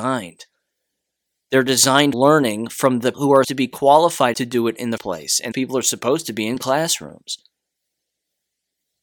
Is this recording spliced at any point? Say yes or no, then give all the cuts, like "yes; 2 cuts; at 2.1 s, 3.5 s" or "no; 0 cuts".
yes; 6 cuts; at 2.1 s, 3.1 s, 3.4 s, 4.3 s, 5.0 s, 5.5 s